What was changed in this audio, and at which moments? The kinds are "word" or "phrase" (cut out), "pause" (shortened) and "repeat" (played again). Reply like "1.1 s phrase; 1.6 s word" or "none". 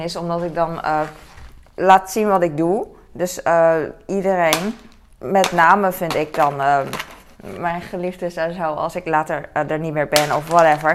none